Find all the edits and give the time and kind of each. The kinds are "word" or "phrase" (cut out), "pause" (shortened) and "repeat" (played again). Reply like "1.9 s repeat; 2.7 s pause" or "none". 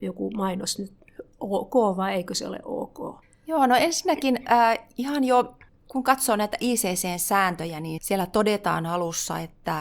3.2 s pause; 5.7 s pause; 8.0 s word

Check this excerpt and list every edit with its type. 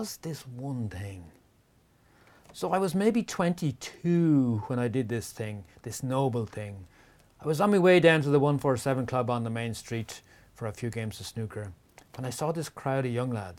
none

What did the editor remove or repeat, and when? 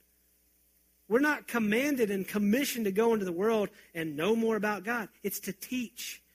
none

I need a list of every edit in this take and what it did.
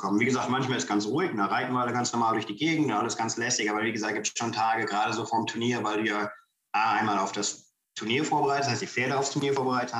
none

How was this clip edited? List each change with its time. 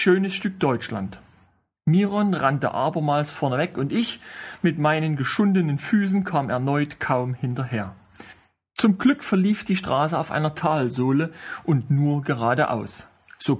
none

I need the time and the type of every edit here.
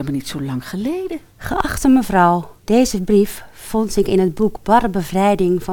1.3 s pause; 2.6 s pause

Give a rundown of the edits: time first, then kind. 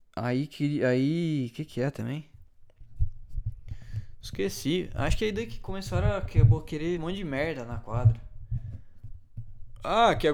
7.0 s word

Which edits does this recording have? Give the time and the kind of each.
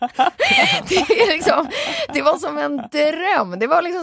none

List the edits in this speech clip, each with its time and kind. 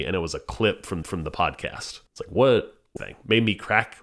1.0 s repeat; 2.1 s pause; 3.0 s phrase

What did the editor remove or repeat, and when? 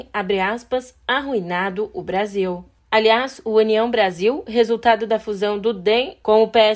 2.8 s pause

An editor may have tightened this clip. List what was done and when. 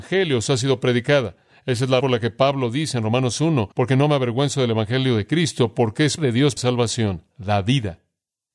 2.0 s word; 3.7 s pause; 6.2 s word; 6.6 s word

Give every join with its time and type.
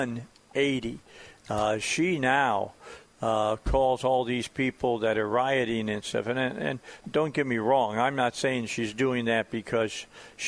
7.0 s word

